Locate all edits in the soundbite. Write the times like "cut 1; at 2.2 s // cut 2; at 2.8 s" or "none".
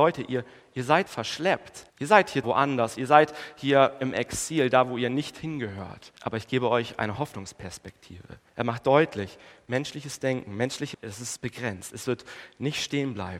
cut 1; at 1.1 s // cut 2; at 1.9 s // cut 3; at 2.4 s // cut 4; at 6.2 s // cut 5; at 8.5 s // cut 6; at 10.9 s

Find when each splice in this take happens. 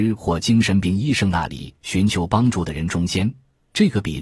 none

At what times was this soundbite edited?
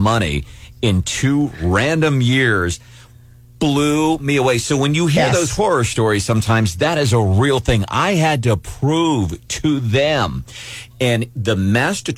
none

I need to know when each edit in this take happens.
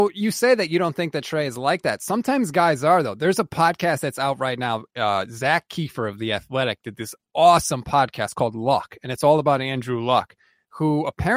none

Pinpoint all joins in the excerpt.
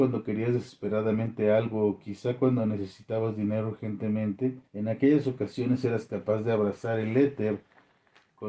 cut 1; at 4.7 s

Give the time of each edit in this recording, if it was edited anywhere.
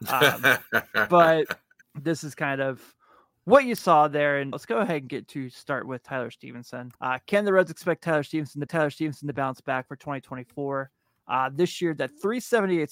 cut 1; at 1.8 s // cut 2; at 4.5 s // cut 3; at 7.0 s // cut 4; at 8.7 s

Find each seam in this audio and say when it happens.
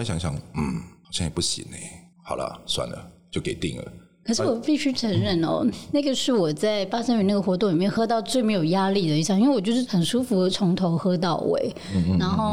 cut 1; at 2.1 s

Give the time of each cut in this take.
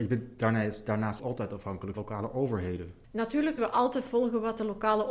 cut 1; at 1.2 s // cut 2; at 1.9 s // cut 3; at 3.6 s

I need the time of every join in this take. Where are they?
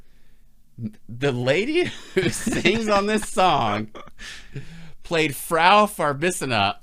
none

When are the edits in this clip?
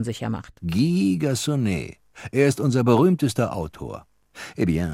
none

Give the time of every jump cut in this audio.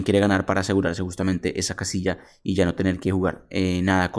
none

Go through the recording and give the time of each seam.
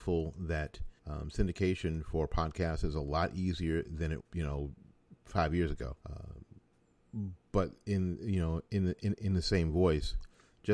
cut 1; at 1.0 s // cut 2; at 4.2 s // cut 3; at 6.0 s

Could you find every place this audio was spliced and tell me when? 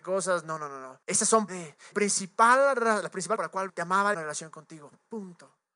cut 1; at 1.0 s // cut 2; at 1.5 s // cut 3; at 1.9 s // cut 4; at 3.4 s // cut 5; at 3.7 s // cut 6; at 4.1 s

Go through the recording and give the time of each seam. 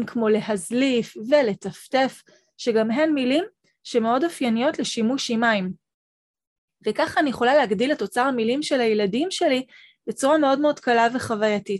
none

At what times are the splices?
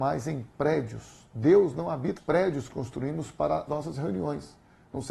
cut 1; at 2.2 s // cut 2; at 2.7 s // cut 3; at 3.7 s

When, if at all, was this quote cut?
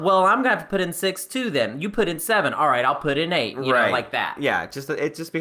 none

